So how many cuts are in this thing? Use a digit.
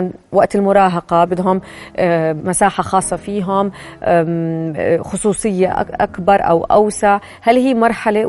2